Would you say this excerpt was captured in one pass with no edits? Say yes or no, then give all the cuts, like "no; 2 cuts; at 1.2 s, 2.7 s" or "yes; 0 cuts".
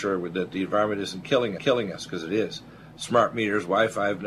no; 1 cut; at 1.6 s